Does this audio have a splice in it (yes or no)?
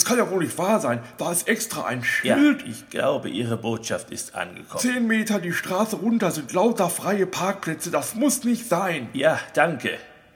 no